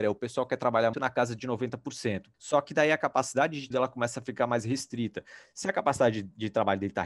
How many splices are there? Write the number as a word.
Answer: three